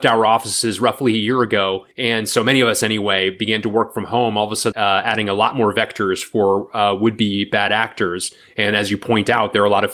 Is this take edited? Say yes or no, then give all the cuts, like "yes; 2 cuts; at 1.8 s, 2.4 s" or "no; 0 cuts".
yes; 2 cuts; at 1.9 s, 4.7 s